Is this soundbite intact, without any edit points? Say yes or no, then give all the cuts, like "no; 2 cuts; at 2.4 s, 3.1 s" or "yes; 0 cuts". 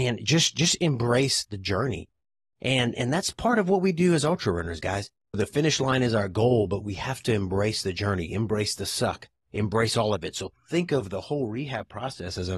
yes; 0 cuts